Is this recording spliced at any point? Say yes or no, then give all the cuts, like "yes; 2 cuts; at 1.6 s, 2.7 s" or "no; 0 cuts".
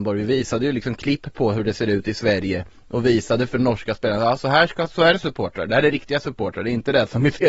no; 0 cuts